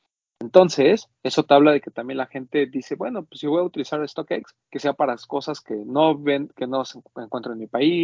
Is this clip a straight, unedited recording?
no; 2 cuts; at 1.1 s, 4.6 s

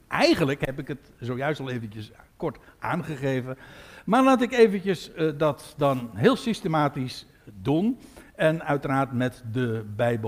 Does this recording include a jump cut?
no; 0 cuts

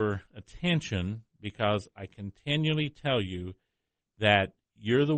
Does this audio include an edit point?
no; 0 cuts

